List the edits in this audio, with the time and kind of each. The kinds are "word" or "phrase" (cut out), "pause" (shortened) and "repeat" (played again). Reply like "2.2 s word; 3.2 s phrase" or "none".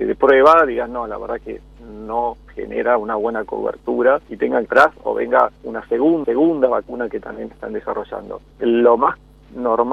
4.2 s pause; 4.6 s phrase; 5.6 s pause; 6.2 s repeat; 8.5 s pause